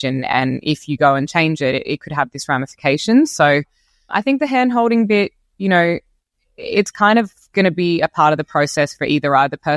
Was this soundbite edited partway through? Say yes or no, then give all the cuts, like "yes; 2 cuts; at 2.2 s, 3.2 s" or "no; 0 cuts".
no; 0 cuts